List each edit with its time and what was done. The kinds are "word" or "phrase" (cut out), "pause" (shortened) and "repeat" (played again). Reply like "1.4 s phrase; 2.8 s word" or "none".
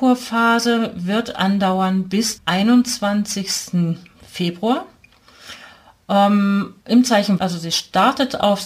2.4 s word; 6.8 s pause; 7.4 s word